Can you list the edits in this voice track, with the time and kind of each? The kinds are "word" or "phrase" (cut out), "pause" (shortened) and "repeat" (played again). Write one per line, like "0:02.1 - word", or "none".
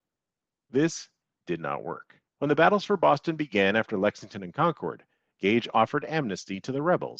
0:02.3 - pause